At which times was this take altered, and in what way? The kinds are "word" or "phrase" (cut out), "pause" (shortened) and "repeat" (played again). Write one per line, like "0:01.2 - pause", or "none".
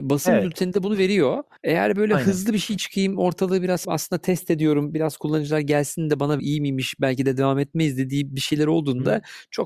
0:01.6 - pause
0:03.8 - word
0:06.4 - phrase